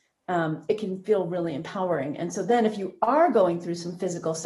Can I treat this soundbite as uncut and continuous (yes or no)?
yes